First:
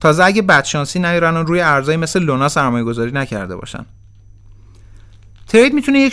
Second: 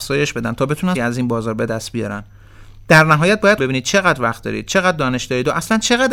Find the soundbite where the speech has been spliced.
second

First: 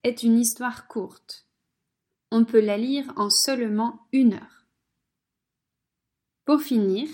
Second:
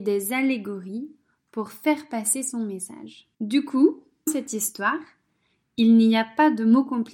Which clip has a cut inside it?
second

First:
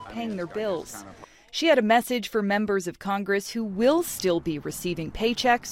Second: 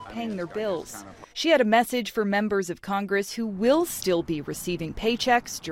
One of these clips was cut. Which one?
second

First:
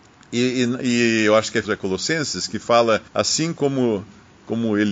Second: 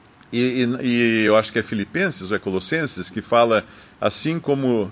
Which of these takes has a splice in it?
first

